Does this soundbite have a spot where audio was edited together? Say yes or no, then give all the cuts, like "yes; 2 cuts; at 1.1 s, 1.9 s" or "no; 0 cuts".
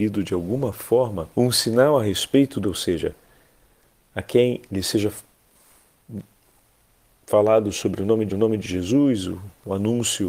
yes; 3 cuts; at 1.3 s, 2.6 s, 8.3 s